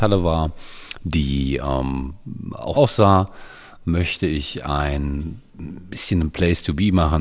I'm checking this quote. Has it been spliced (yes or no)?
yes